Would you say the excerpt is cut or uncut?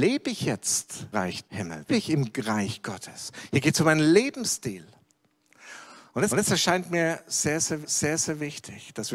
cut